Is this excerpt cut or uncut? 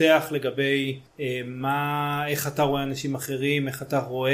uncut